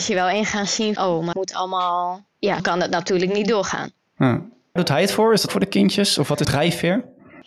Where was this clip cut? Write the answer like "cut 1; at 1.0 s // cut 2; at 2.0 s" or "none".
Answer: cut 1; at 1.0 s // cut 2; at 1.3 s // cut 3; at 2.6 s // cut 4; at 4.8 s // cut 5; at 5.5 s // cut 6; at 6.4 s